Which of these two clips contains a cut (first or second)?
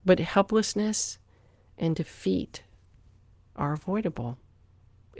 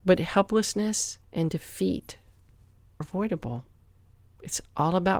second